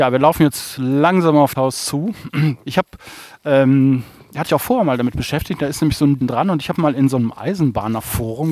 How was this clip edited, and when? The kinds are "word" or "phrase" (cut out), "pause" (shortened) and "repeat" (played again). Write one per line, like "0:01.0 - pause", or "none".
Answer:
0:01.5 - word
0:04.5 - word
0:06.2 - word